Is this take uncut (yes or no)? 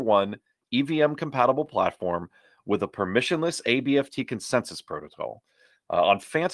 yes